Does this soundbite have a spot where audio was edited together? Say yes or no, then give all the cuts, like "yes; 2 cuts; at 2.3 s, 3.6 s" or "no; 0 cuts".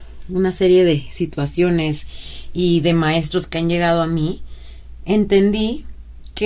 no; 0 cuts